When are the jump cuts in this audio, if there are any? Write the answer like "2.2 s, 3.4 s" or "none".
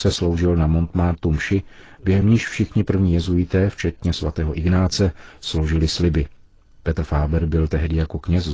none